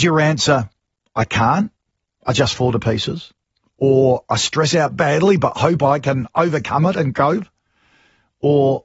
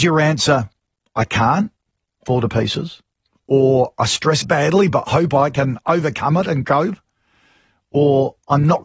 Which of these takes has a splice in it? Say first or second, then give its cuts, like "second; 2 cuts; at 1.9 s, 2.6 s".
second; 2 cuts; at 2.3 s, 4.4 s